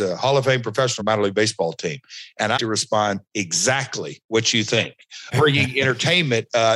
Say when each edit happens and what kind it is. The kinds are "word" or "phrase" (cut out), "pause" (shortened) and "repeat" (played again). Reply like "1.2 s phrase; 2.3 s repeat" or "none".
1.0 s phrase; 2.6 s word; 5.3 s word